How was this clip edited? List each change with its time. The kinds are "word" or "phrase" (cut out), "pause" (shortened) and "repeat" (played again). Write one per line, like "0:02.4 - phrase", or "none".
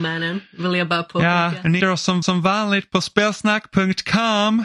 0:01.8 - word
0:02.2 - repeat